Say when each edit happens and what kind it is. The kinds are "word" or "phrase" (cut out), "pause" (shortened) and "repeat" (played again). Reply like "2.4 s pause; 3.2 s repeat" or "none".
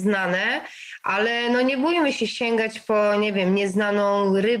none